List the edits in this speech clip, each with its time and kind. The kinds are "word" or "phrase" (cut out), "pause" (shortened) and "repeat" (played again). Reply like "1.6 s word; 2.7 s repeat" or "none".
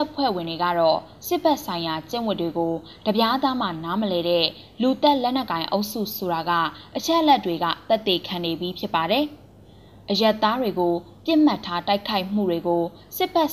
none